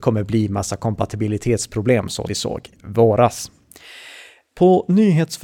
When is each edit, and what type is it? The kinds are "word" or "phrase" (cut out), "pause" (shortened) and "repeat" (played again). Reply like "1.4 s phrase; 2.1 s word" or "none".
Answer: 2.3 s word; 2.7 s word